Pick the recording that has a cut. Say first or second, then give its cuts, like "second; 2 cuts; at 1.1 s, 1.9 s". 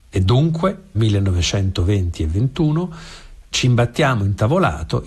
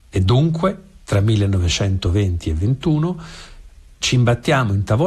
first; 2 cuts; at 0.9 s, 3.4 s